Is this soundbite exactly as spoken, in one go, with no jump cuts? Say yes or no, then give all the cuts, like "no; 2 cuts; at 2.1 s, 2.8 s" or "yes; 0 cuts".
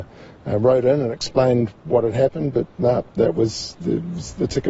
yes; 0 cuts